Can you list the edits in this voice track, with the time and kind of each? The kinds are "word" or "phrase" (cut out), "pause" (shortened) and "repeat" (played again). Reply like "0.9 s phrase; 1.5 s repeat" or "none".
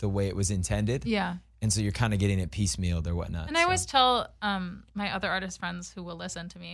4.9 s pause